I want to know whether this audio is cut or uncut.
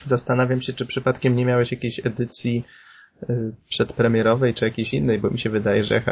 uncut